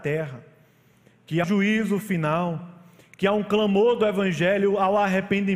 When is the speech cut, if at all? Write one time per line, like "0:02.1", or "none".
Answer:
0:01.4